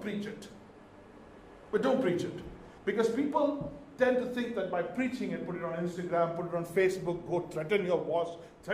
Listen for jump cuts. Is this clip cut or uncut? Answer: cut